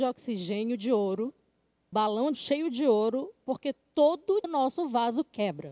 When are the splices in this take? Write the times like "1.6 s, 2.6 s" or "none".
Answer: 1.9 s, 2.3 s, 4.4 s